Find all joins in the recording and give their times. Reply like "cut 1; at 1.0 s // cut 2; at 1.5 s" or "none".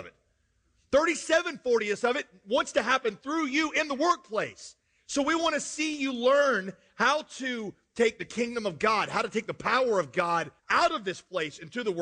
cut 1; at 10.6 s